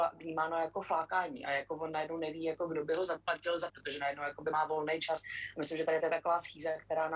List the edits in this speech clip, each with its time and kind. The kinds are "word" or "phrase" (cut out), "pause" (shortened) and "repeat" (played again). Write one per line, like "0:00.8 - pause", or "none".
0:03.7 - word